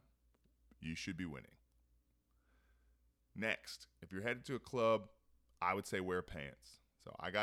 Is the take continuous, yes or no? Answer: yes